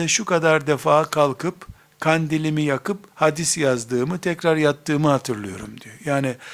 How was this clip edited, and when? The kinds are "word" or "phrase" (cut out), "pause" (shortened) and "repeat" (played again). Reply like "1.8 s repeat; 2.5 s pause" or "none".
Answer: none